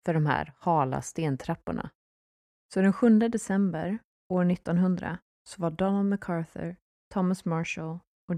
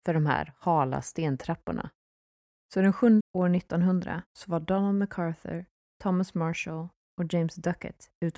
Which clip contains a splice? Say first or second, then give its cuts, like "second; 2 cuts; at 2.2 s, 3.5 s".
second; 2 cuts; at 3.2 s, 4.3 s